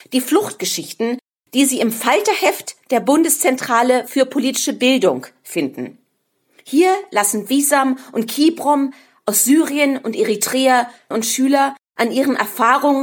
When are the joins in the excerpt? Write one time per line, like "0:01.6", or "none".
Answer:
0:11.1